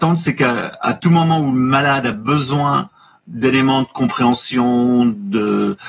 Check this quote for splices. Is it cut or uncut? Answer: uncut